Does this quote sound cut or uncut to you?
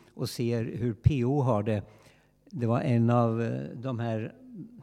uncut